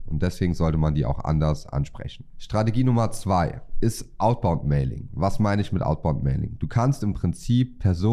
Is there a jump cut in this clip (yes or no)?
no